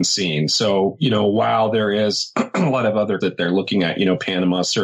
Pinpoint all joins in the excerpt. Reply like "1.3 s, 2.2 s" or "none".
3.2 s